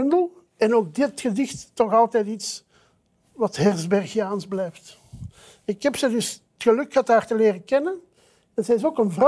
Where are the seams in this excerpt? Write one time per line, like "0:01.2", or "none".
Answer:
none